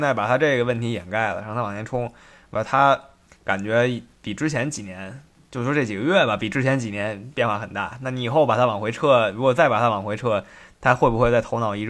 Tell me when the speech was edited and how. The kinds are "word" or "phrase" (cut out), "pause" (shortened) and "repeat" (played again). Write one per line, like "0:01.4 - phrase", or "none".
none

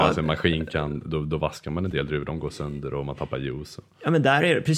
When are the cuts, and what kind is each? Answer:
none

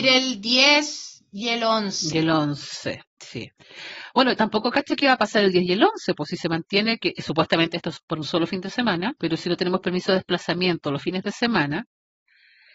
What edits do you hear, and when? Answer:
0:09.2 - pause

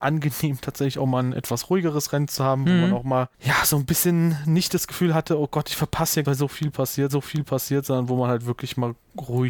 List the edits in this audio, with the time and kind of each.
0:03.3 - pause
0:06.2 - phrase
0:07.1 - repeat

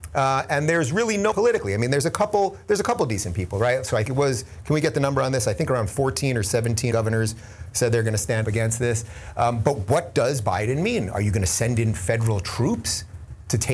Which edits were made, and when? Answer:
0:01.3 - word
0:04.0 - word
0:06.9 - word
0:08.4 - word

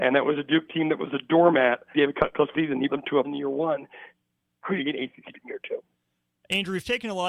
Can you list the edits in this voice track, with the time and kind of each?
0:01.9 - word
0:02.5 - word
0:02.9 - word
0:03.2 - word
0:04.8 - word
0:05.3 - word

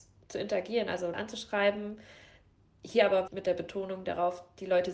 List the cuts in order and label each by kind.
0:01.1 - word
0:03.3 - word

